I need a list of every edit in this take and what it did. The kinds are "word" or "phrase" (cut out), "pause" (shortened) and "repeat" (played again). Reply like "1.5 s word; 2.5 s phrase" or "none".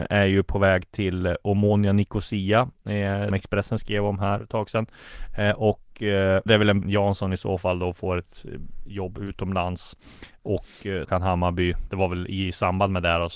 3.3 s word; 4.4 s word; 6.5 s word; 6.8 s phrase; 11.0 s word; 11.9 s word